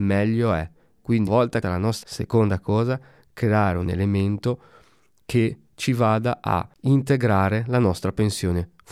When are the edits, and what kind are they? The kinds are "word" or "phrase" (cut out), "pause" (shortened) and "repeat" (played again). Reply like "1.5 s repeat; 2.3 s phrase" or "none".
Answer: 1.3 s word; 1.6 s word; 2.0 s word